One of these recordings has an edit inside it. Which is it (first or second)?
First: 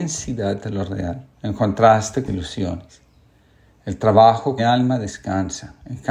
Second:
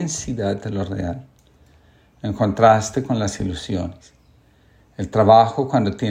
first